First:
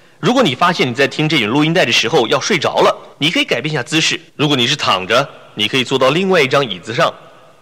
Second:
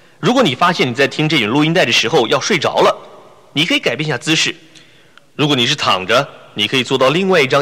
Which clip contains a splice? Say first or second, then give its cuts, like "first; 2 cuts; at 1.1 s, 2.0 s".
first; 2 cuts; at 3.1 s, 4.3 s